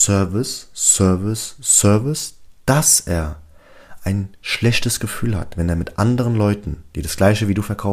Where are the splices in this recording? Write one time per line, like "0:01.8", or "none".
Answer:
none